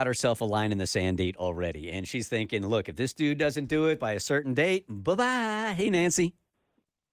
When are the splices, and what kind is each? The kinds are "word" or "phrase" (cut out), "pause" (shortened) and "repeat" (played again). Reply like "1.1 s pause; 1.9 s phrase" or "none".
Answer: none